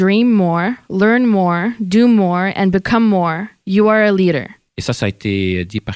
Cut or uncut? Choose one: uncut